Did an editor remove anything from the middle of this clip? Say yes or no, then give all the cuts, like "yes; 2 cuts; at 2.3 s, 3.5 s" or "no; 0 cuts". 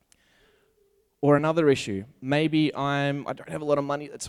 no; 0 cuts